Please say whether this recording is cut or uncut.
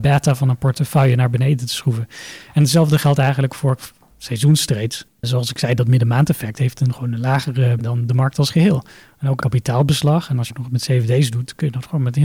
cut